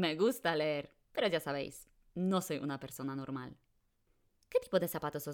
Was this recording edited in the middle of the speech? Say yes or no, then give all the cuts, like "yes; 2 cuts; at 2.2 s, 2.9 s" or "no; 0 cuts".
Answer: yes; 1 cut; at 1.0 s